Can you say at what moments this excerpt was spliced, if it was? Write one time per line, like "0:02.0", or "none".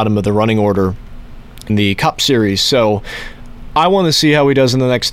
0:01.7